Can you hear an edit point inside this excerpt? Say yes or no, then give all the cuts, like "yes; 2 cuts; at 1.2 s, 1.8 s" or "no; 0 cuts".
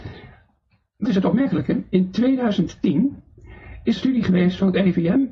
yes; 2 cuts; at 1.1 s, 4.0 s